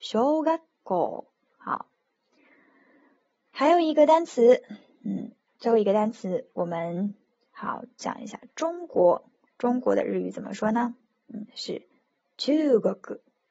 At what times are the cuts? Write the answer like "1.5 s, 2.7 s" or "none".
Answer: none